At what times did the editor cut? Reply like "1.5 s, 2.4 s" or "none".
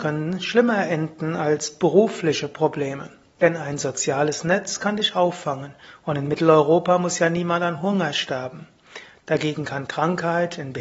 none